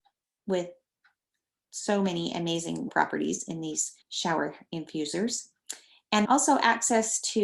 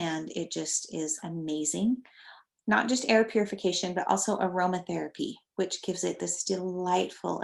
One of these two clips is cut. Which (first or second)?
first